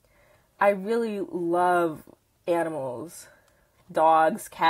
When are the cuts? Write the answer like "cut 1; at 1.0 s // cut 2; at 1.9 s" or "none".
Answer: none